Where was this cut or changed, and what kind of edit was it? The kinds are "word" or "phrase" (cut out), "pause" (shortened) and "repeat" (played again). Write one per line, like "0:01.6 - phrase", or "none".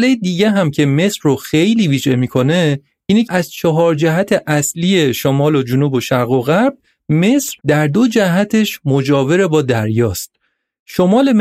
0:03.3 - word
0:07.6 - pause